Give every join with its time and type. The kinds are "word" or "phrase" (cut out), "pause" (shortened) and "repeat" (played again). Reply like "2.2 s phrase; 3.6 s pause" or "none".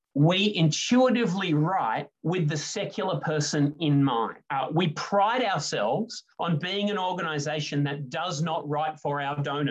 2.1 s pause; 4.5 s pause; 6.3 s pause